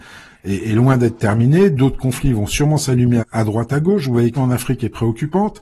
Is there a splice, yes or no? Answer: yes